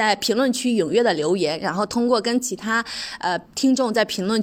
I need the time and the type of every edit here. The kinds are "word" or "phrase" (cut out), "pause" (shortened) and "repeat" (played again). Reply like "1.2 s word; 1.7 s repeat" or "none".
3.4 s pause